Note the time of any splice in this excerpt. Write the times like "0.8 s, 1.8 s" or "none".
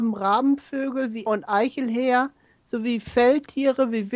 1.3 s